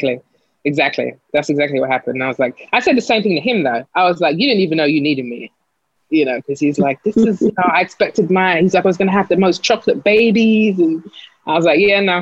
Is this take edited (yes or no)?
yes